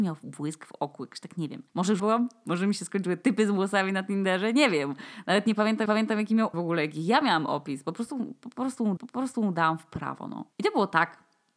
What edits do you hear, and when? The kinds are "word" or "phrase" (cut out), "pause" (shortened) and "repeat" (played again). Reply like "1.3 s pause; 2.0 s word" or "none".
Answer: 1.7 s pause; 2.0 s word; 5.9 s repeat; 6.5 s word; 9.0 s repeat; 10.5 s pause